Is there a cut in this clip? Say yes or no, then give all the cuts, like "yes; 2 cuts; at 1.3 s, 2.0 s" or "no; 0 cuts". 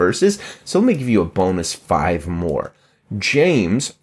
no; 0 cuts